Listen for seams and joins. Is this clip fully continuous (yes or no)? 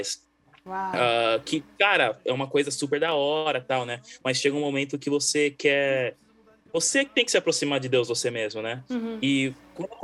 yes